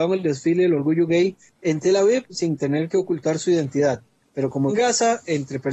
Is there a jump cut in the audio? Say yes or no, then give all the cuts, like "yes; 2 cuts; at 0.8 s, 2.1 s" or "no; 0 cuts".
yes; 1 cut; at 4.7 s